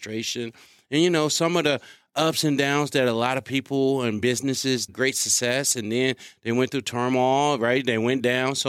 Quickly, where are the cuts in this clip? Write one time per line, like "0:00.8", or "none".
0:04.9